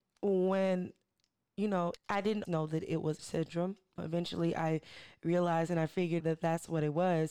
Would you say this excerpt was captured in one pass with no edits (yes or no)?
no